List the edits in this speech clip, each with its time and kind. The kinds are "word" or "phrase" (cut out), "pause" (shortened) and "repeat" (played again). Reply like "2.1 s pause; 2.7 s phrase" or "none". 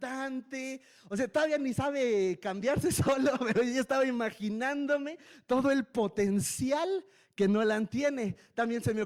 none